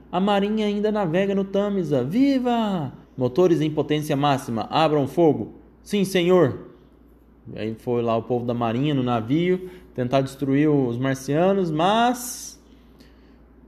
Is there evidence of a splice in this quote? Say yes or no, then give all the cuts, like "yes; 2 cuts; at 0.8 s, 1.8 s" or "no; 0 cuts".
yes; 1 cut; at 3.1 s